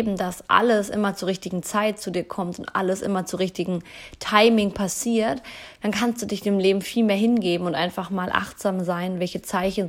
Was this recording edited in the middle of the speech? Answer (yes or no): no